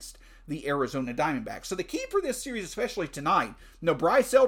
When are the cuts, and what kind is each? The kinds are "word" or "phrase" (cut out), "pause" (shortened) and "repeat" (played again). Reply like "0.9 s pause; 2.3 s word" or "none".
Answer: none